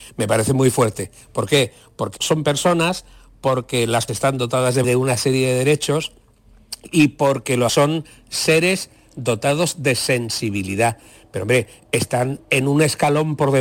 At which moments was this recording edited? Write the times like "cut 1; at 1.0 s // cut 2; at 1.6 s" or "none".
cut 1; at 2.2 s // cut 2; at 4.1 s // cut 3; at 4.8 s // cut 4; at 7.7 s

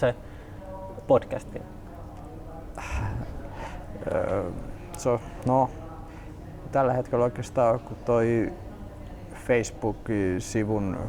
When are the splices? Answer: cut 1; at 6.7 s

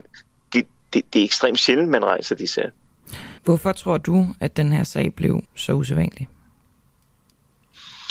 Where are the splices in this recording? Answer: cut 1; at 3.4 s // cut 2; at 5.4 s

